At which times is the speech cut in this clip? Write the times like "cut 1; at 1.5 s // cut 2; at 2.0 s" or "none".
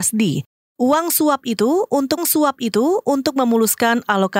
cut 1; at 2.2 s